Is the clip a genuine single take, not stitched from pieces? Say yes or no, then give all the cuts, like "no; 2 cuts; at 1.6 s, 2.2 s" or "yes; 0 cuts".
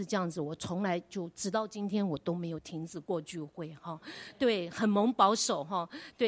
yes; 0 cuts